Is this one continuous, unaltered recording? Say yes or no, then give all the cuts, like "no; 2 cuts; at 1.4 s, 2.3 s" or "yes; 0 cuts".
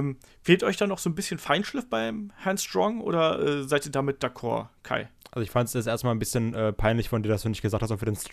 yes; 0 cuts